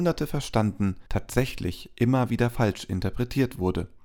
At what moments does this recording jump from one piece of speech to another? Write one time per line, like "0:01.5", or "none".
0:01.1